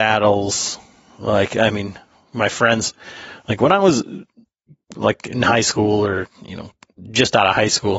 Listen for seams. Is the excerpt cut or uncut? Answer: uncut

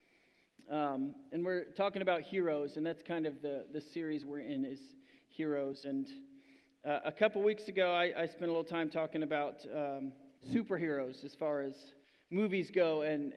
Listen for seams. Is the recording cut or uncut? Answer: cut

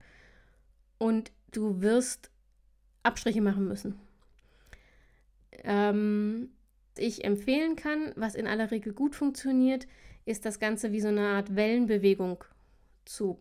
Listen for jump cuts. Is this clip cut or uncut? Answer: cut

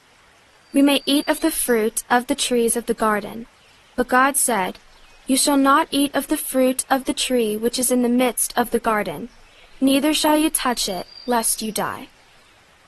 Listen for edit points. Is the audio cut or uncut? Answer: uncut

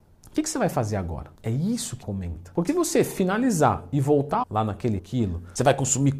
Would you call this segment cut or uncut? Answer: cut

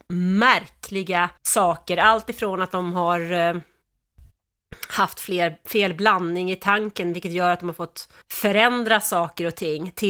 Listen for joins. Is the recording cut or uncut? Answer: cut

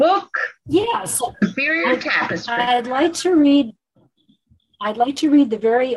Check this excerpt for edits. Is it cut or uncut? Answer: uncut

